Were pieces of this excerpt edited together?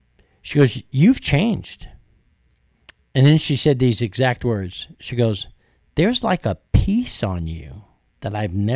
no; 0 cuts

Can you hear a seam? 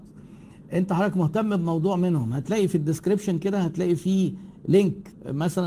no; 0 cuts

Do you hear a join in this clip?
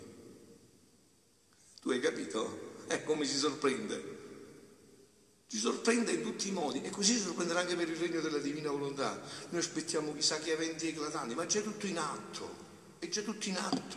no; 0 cuts

